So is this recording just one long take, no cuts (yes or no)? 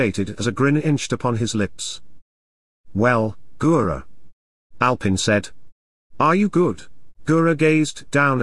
yes